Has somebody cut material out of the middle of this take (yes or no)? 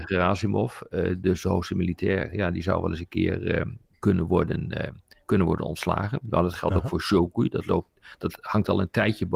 no